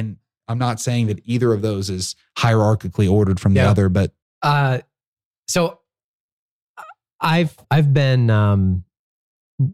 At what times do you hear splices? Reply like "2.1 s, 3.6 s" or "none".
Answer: 4.2 s, 7.6 s